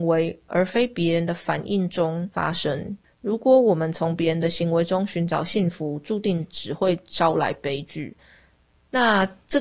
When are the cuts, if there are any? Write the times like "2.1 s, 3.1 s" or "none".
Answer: none